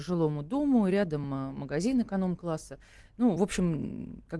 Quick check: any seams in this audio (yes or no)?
no